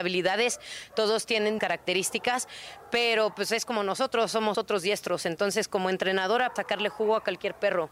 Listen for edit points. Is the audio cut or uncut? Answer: cut